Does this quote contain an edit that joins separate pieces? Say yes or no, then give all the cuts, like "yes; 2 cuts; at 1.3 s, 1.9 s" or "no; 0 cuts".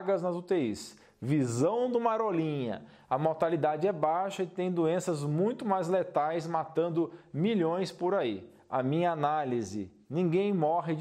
no; 0 cuts